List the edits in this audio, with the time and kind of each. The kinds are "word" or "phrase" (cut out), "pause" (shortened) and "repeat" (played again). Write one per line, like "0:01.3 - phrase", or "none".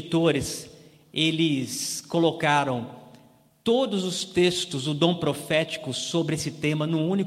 none